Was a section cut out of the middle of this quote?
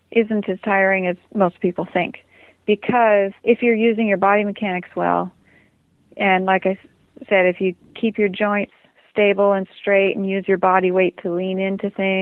yes; 2 cuts; at 1.2 s, 3.4 s

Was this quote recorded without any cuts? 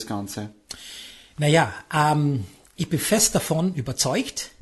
yes; 0 cuts

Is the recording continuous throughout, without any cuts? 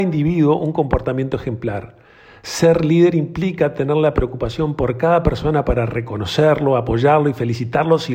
yes; 0 cuts

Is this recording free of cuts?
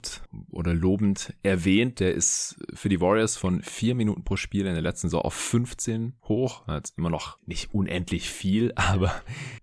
yes; 0 cuts

